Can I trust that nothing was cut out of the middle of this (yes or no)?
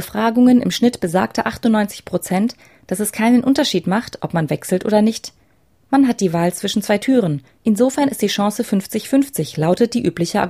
yes